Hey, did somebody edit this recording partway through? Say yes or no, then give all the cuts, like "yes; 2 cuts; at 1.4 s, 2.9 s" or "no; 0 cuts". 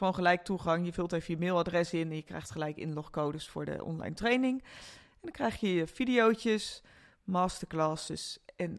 no; 0 cuts